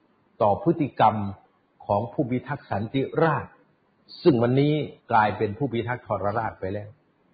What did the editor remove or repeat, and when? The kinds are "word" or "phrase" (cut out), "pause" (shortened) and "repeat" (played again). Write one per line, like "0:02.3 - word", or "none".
0:05.0 - pause